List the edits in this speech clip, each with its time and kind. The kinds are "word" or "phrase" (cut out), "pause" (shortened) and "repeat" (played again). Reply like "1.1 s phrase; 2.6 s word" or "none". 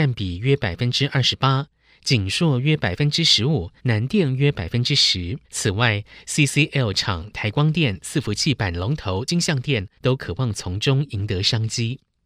3.8 s pause; 5.4 s pause; 10.0 s pause